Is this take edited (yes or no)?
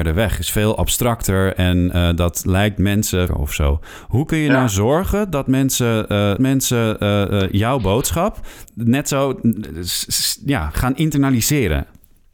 yes